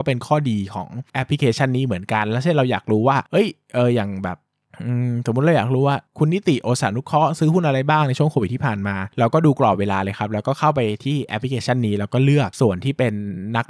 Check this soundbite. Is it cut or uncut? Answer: cut